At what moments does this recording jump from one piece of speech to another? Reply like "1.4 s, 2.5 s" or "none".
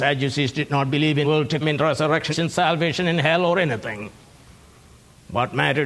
1.2 s, 1.6 s, 2.3 s